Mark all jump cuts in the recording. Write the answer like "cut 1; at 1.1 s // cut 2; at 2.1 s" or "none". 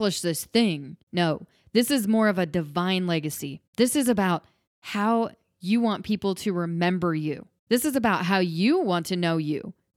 cut 1; at 1.0 s // cut 2; at 3.7 s // cut 3; at 4.7 s // cut 4; at 7.6 s